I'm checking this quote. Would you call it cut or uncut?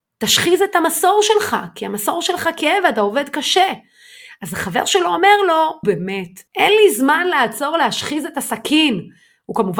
cut